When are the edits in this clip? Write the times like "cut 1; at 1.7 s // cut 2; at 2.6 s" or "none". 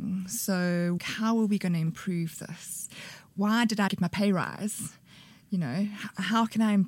cut 1; at 1.0 s // cut 2; at 3.9 s